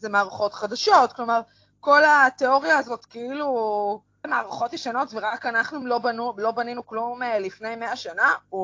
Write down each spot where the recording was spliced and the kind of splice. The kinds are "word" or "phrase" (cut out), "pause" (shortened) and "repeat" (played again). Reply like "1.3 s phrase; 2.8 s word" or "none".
4.2 s word; 5.8 s word